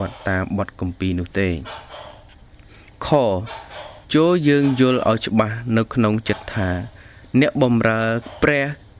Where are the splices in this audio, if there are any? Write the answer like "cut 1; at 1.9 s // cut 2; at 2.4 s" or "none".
cut 1; at 4.0 s